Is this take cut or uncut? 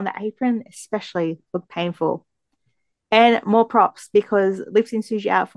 uncut